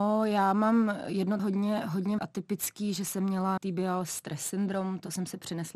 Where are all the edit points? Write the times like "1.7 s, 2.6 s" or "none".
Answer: 1.4 s, 2.2 s, 3.6 s